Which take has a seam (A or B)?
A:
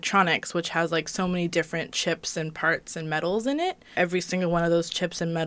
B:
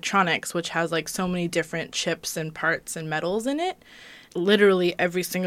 A